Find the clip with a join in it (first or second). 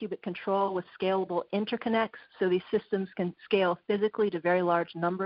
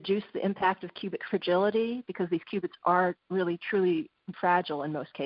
second